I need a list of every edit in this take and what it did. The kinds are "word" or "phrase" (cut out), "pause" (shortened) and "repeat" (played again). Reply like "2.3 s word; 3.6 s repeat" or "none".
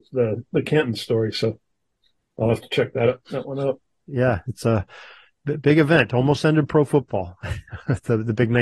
none